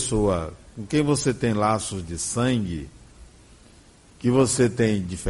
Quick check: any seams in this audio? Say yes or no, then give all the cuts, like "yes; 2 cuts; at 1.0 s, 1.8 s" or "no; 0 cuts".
no; 0 cuts